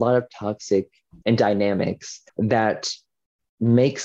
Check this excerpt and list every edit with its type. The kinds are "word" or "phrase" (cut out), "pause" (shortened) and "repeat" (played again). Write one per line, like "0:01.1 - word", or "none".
0:01.2 - word
0:02.3 - pause